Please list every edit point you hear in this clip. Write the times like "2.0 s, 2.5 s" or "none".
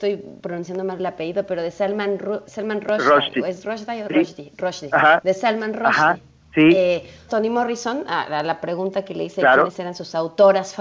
2.5 s, 6.4 s, 7.3 s